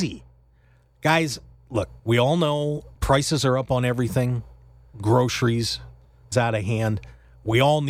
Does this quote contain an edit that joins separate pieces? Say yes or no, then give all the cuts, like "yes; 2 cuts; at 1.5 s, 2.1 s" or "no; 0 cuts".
yes; 4 cuts; at 2.0 s, 2.9 s, 4.9 s, 6.3 s